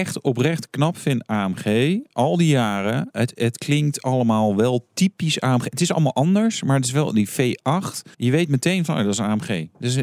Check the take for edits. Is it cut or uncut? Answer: cut